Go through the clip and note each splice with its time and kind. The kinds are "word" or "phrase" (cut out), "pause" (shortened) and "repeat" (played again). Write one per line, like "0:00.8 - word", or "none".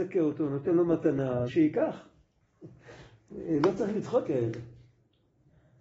0:01.5 - word
0:04.2 - word